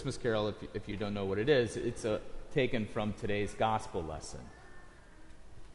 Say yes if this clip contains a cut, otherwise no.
yes